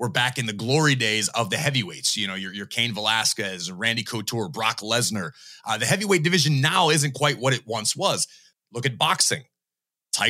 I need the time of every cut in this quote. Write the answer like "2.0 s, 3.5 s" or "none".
8.5 s